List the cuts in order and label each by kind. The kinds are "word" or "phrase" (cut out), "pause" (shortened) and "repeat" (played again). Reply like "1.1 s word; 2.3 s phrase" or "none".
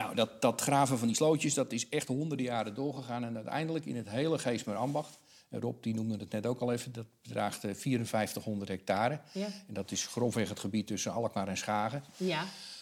none